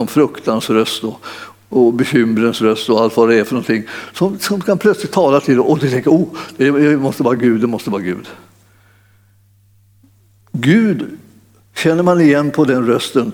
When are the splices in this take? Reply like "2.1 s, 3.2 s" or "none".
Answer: none

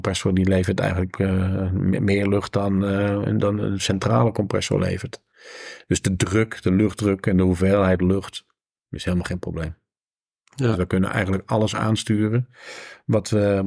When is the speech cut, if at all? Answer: none

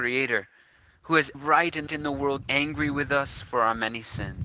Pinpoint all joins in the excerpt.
1.3 s, 1.9 s, 2.4 s

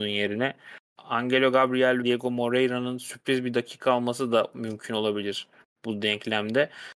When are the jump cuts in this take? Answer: 2.0 s

